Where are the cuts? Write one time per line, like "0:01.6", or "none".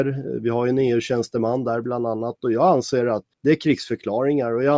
0:03.3